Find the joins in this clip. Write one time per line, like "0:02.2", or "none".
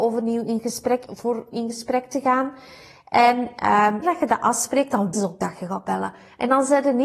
0:01.1
0:01.5
0:04.0
0:05.1

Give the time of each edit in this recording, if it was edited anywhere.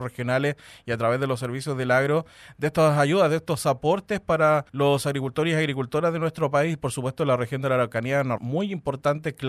0:04.7
0:08.4

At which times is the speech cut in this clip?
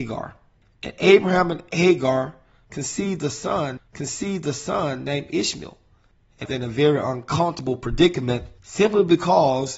0:03.8
0:06.5
0:08.6

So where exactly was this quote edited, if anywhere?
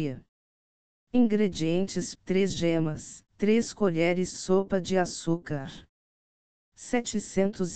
0:02.1
0:03.3

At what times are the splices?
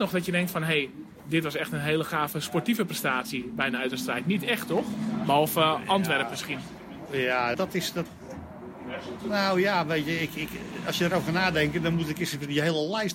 0:07.5

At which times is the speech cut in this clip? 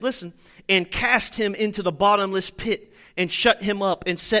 none

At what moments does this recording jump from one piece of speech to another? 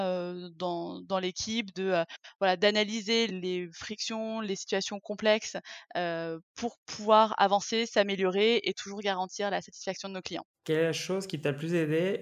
0:03.3
0:10.5

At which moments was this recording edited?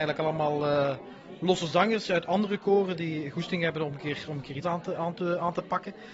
0:04.6

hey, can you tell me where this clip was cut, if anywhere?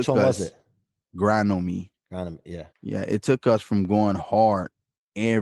0:02.7

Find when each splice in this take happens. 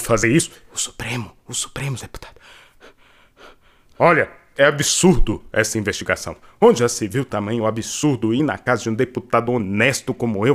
0:02.0

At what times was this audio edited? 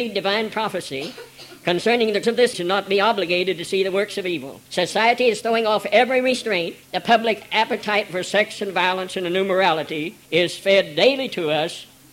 0:02.2
0:02.5
0:04.7
0:06.8
0:10.2

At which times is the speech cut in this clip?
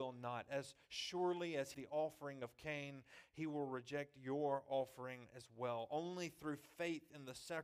0:01.7

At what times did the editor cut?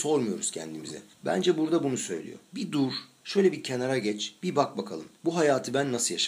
0:01.1
0:02.5
0:05.2

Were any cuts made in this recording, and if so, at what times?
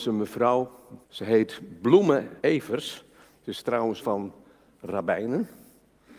0:01.0
0:02.4
0:04.0

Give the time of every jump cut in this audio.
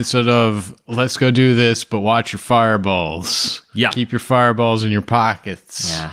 none

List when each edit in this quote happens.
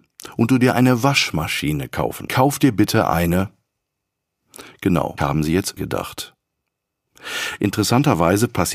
0:02.3
0:05.2
0:05.8

